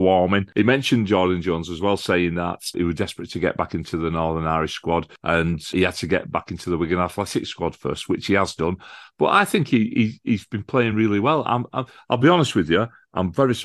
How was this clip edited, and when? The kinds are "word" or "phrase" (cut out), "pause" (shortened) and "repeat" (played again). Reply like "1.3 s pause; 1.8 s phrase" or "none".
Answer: none